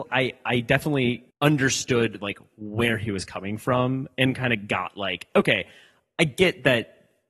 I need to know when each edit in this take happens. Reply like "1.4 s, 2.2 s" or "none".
1.3 s